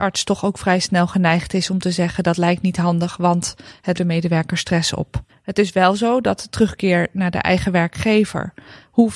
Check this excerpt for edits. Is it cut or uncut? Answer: cut